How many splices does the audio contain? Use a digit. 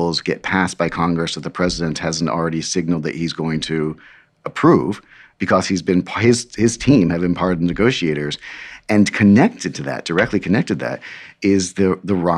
0